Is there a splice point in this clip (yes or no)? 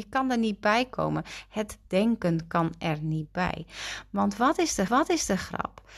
yes